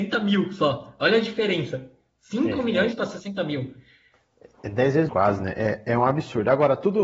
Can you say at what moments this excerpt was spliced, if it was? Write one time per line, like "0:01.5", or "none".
0:05.1

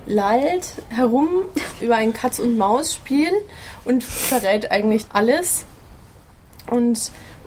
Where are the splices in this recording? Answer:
0:01.8
0:05.1

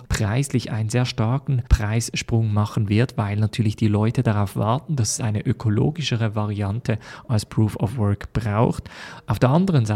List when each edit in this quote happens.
none

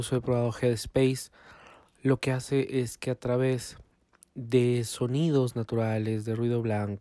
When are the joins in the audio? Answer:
none

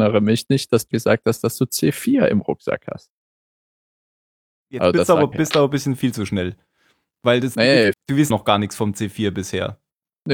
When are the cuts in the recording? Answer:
0:00.9
0:05.3
0:07.9
0:08.3

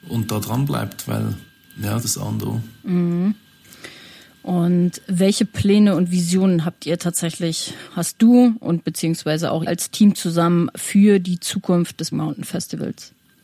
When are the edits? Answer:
0:02.0
0:07.9
0:09.7
0:12.1

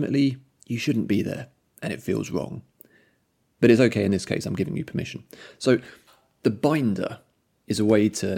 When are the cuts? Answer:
none

